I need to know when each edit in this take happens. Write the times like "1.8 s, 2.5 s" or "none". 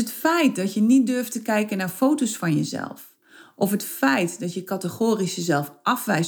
none